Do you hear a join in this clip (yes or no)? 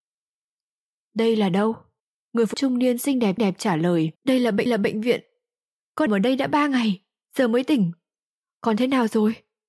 yes